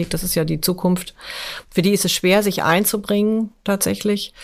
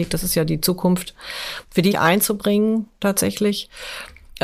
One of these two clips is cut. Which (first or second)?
second